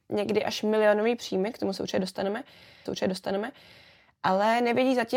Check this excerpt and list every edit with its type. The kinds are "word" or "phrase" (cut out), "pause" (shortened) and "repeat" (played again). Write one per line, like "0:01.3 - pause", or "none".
0:02.9 - repeat

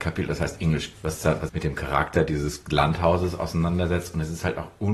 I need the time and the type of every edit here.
0:00.9 - word
0:01.5 - phrase

